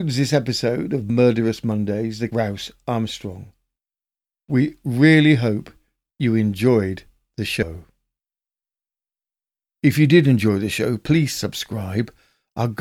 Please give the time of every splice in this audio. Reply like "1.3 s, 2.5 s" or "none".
2.3 s